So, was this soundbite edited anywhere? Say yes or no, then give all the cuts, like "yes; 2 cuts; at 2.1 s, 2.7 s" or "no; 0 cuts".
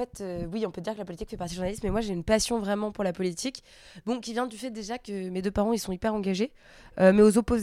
no; 0 cuts